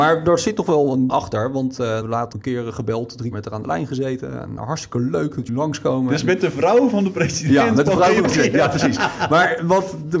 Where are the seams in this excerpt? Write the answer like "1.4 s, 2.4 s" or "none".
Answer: 1.1 s, 2.0 s, 2.3 s, 3.3 s, 4.6 s, 5.5 s, 8.2 s